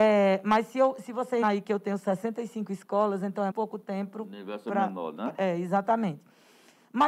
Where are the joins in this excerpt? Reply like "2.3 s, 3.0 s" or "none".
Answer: 1.4 s, 3.5 s